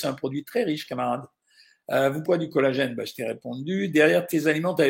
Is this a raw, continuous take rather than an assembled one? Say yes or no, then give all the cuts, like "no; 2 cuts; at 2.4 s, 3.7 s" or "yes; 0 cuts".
no; 1 cut; at 2.2 s